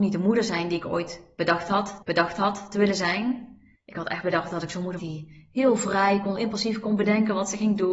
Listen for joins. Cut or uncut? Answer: cut